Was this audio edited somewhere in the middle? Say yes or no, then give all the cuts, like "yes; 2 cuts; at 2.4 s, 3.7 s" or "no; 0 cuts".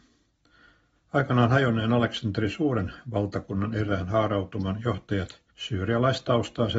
yes; 1 cut; at 5.5 s